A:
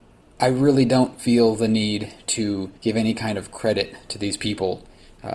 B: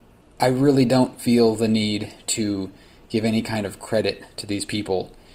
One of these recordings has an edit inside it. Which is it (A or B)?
A